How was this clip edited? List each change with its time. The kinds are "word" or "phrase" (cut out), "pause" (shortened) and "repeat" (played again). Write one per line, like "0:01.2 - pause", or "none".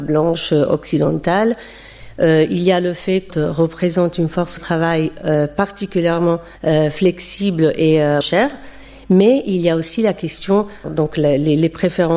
0:03.3 - phrase
0:04.6 - word
0:06.6 - pause
0:08.2 - word
0:10.8 - phrase